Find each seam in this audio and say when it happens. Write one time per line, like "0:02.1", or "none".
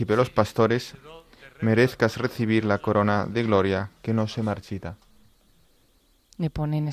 none